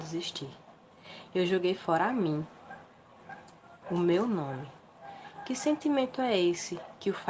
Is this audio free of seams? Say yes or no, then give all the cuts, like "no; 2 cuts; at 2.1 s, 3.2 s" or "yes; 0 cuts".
yes; 0 cuts